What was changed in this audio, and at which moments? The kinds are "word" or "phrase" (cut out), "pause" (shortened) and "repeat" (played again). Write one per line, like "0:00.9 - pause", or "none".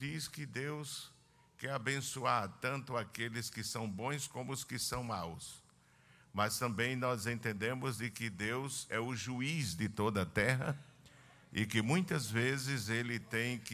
none